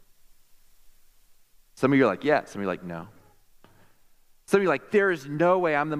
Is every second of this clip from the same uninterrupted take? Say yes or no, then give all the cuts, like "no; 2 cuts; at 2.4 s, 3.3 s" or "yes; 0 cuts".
yes; 0 cuts